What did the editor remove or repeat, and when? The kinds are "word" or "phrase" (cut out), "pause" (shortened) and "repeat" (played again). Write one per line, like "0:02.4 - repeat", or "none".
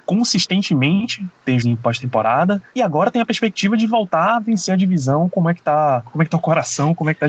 0:01.6 - word